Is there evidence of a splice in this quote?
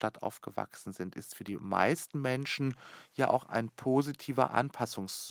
no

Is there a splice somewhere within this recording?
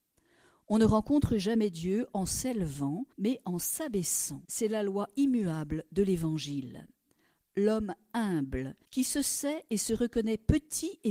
yes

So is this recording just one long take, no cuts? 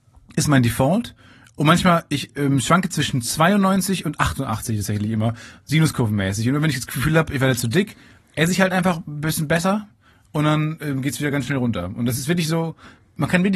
yes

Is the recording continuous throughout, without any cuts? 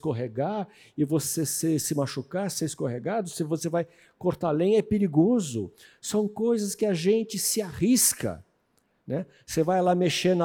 yes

